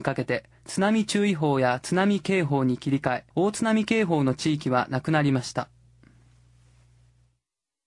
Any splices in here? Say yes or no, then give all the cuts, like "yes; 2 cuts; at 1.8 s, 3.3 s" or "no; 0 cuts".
yes; 1 cut; at 3.3 s